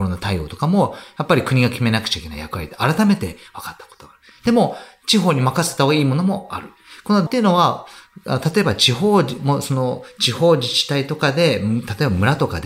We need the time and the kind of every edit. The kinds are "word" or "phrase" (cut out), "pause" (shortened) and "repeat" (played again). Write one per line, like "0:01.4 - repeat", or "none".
0:07.3 - word